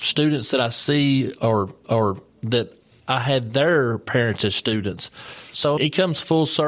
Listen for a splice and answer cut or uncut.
cut